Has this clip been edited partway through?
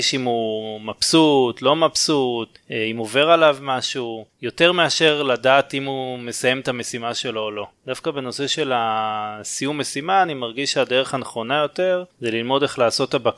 no; 0 cuts

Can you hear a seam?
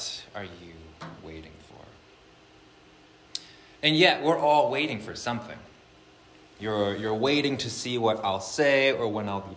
no; 0 cuts

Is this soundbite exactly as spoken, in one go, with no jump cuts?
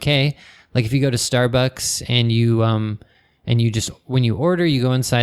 yes; 0 cuts

